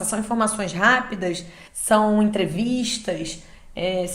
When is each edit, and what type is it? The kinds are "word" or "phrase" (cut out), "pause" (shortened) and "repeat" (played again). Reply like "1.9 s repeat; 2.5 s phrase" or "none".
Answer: 1.7 s pause